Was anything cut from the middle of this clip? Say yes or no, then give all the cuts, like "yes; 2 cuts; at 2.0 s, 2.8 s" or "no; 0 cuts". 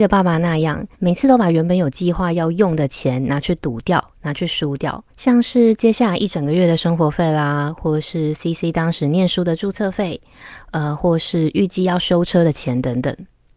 yes; 2 cuts; at 0.9 s, 5.1 s